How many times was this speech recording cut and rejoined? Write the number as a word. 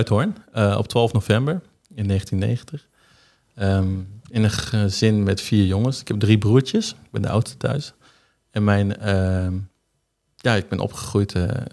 one